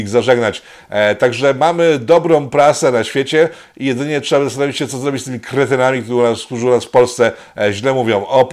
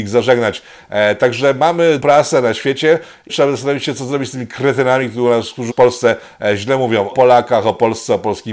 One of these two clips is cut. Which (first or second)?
second